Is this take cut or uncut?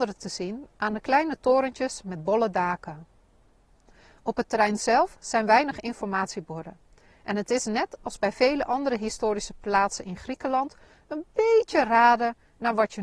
uncut